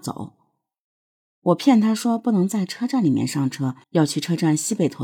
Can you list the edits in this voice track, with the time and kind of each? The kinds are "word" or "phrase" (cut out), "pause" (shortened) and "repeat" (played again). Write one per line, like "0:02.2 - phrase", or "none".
0:03.8 - pause